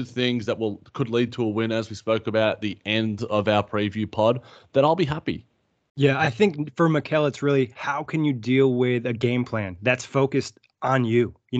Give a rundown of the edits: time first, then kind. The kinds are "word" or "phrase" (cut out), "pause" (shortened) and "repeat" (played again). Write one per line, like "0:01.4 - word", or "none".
none